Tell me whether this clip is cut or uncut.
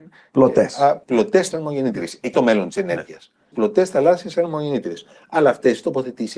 cut